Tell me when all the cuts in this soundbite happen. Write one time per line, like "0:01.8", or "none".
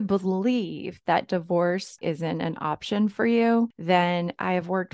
0:02.0